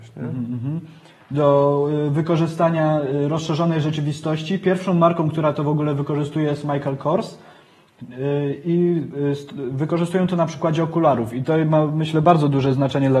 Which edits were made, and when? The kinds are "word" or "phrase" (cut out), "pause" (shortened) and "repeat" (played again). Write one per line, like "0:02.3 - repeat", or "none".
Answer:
none